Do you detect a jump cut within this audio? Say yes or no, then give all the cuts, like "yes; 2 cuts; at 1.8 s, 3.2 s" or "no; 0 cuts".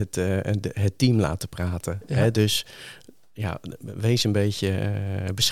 no; 0 cuts